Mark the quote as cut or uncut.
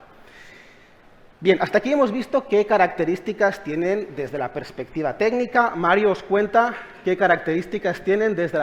uncut